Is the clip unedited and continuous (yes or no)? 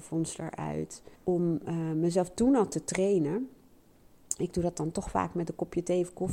no